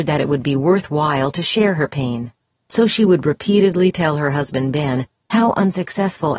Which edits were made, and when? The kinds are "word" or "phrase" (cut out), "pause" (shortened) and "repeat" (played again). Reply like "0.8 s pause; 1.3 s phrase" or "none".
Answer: none